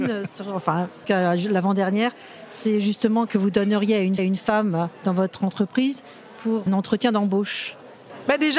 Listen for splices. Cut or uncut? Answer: cut